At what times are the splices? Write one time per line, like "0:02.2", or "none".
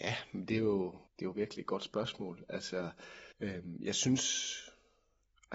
0:01.1
0:03.3